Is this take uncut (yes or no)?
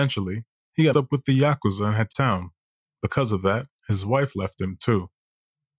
no